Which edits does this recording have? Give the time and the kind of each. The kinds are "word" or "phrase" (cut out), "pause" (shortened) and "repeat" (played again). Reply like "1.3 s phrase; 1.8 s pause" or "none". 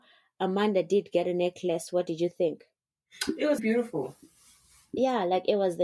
3.6 s word